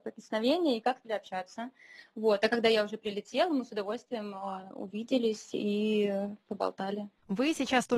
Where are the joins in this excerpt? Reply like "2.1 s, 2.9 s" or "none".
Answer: 1.0 s